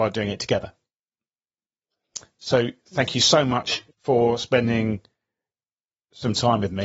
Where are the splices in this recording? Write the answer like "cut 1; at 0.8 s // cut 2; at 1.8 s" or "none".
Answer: cut 1; at 3.9 s